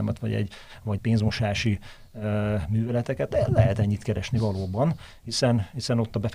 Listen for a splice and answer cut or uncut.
cut